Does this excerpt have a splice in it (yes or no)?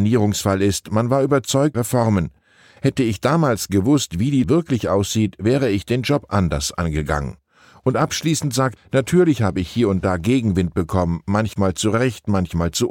yes